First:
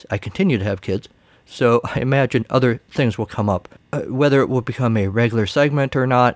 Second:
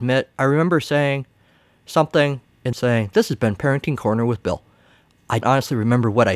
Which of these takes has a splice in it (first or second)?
second